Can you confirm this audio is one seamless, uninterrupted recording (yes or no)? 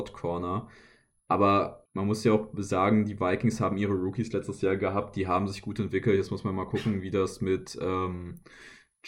no